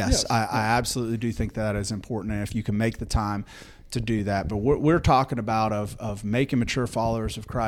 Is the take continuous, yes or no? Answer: yes